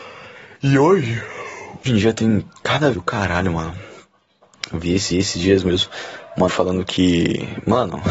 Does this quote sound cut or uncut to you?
cut